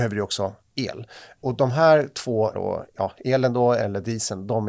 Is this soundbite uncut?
no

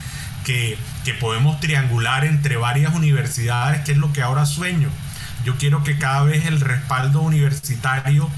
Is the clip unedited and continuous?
yes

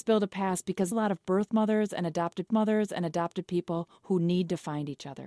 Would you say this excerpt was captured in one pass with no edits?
no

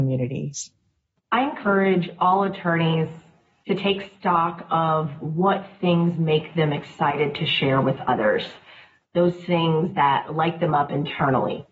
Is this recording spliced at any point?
no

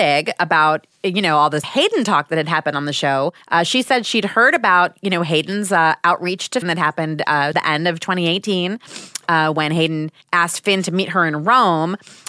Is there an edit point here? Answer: yes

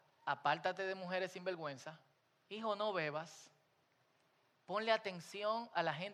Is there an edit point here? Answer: yes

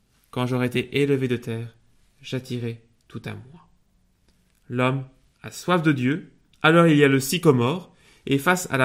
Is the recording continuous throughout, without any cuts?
yes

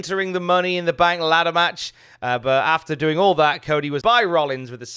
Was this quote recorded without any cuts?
no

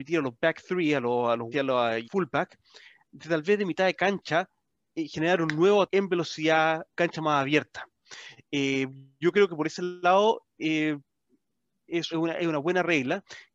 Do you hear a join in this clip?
yes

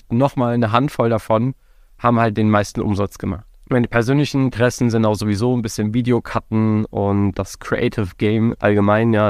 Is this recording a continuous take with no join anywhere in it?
yes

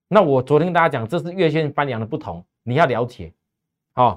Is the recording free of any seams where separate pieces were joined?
yes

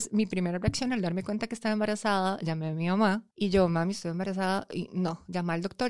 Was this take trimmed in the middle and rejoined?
yes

